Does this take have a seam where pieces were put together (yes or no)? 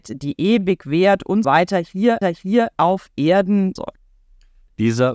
yes